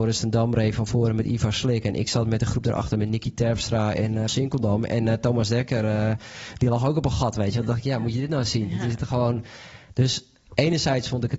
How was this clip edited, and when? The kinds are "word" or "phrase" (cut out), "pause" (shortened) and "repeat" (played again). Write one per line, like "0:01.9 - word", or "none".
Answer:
0:04.3 - word